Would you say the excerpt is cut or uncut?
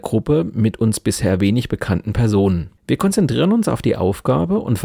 cut